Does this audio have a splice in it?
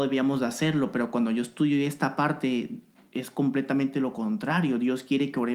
no; 0 cuts

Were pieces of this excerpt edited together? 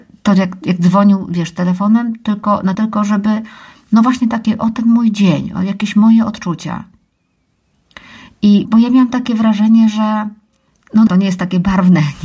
yes; 3 cuts; at 2.7 s, 8.6 s, 11.1 s

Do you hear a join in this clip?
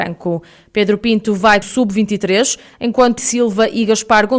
yes; 2 cuts; at 1.6 s, 3.2 s

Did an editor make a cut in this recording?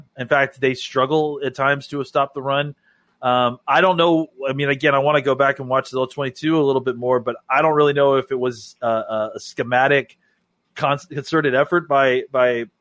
no; 0 cuts

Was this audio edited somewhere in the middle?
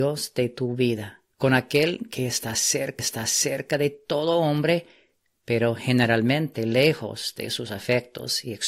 yes; 2 cuts; at 1.3 s, 3.0 s

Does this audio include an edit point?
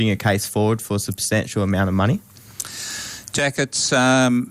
no; 0 cuts

